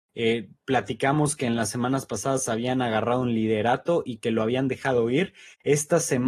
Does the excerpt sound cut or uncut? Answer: uncut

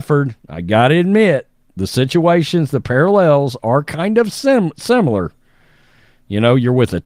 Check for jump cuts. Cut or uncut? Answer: uncut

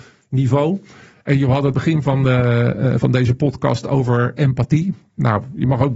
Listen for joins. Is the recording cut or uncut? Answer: cut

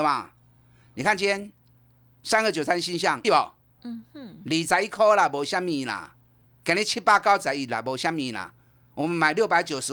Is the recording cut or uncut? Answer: cut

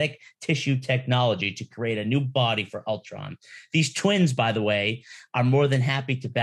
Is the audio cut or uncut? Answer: uncut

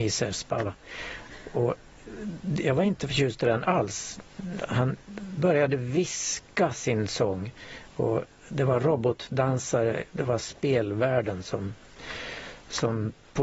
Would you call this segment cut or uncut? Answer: uncut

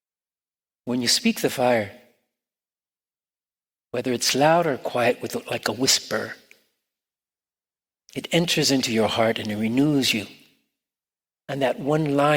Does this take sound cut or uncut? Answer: uncut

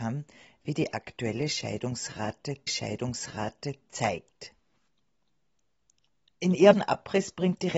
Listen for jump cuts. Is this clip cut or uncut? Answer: cut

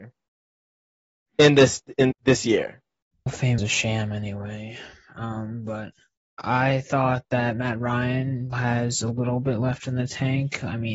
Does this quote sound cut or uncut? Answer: cut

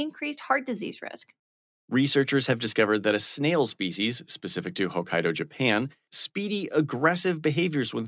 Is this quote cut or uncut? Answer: cut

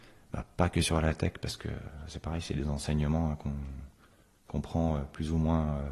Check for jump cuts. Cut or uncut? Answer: uncut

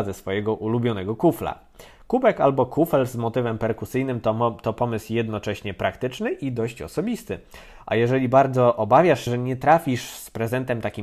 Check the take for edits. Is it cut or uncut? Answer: cut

